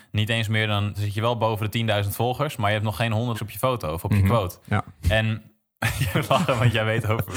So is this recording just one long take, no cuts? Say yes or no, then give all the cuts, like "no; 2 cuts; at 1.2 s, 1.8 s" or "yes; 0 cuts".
no; 3 cuts; at 0.9 s, 3.3 s, 6.1 s